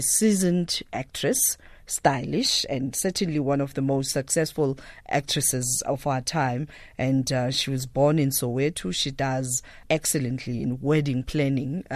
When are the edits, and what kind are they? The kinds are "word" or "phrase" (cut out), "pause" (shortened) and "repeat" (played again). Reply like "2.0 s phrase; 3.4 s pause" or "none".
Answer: 9.8 s word